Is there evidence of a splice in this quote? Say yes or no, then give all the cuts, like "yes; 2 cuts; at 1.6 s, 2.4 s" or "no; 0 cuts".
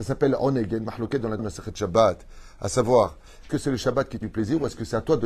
yes; 3 cuts; at 1.4 s, 3.5 s, 4.2 s